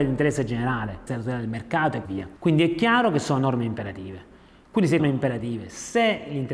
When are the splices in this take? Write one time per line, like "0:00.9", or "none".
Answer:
0:01.1
0:02.0
0:02.4
0:05.0